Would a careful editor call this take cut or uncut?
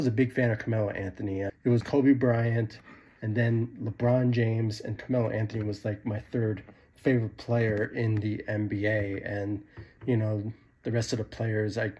cut